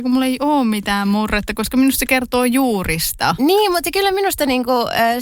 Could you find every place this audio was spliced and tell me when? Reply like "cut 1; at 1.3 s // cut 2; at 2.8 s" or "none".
none